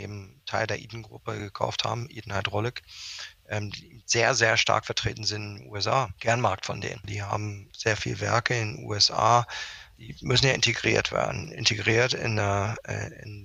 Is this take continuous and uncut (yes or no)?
yes